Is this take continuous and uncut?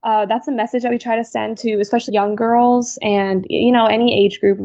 no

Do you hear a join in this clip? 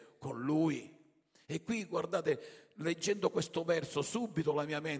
no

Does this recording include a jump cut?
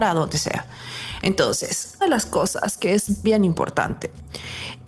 yes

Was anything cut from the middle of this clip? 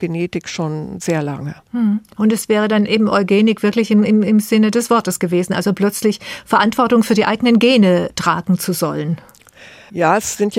no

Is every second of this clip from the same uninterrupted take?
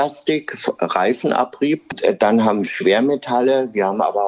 no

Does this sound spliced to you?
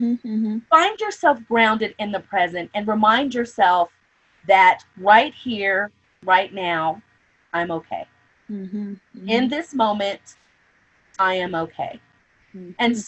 no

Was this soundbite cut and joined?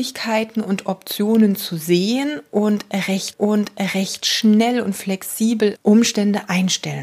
yes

